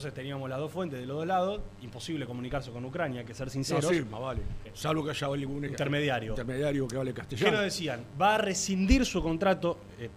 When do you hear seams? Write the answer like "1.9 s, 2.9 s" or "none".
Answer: 4.7 s, 5.7 s